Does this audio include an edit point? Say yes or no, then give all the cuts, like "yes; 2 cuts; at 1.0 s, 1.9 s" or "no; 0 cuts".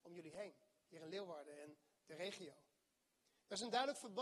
no; 0 cuts